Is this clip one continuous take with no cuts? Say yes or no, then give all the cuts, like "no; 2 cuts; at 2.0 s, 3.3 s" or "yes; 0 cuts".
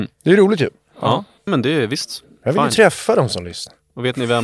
no; 1 cut; at 1.5 s